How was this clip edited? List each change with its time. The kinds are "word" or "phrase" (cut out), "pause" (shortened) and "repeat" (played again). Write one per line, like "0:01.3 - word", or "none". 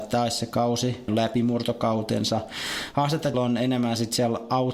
0:01.1 - word
0:03.3 - word